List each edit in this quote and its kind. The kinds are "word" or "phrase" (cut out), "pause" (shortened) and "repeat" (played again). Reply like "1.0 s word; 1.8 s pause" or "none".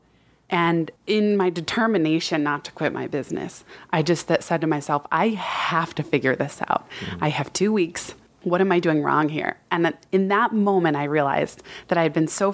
1.0 s pause; 8.3 s pause